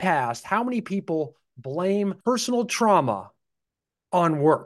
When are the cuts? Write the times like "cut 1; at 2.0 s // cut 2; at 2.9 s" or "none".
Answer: cut 1; at 2.2 s